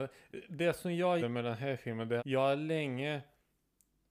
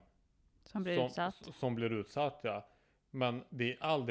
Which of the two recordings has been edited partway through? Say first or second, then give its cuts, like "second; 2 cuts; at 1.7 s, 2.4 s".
first; 2 cuts; at 1.2 s, 2.2 s